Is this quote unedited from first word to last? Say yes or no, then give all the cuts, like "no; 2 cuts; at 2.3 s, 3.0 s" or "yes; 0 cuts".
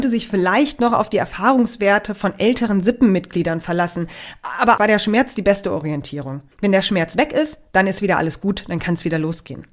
no; 2 cuts; at 4.8 s, 6.5 s